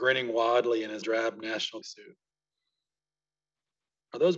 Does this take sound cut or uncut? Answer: cut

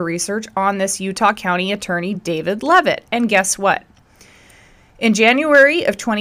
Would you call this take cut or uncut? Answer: uncut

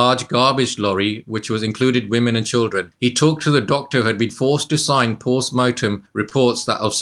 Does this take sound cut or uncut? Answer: uncut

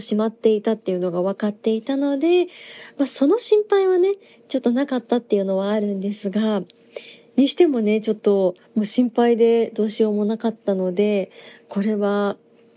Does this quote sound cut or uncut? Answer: cut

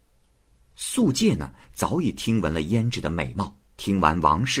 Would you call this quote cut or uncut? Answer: cut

